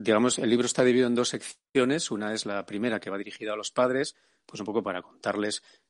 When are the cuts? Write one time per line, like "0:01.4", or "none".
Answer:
none